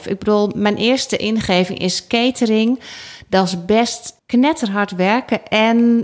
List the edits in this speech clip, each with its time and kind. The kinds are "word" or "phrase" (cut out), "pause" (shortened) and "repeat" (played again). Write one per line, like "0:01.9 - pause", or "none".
0:04.2 - pause